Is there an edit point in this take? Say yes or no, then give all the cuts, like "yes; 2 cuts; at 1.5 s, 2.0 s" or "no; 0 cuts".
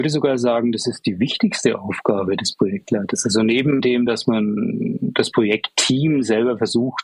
no; 0 cuts